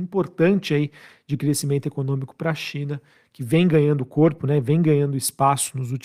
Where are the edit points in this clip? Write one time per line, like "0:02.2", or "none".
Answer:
none